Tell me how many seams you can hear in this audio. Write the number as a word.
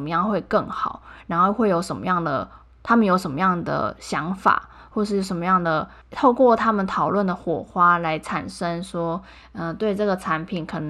one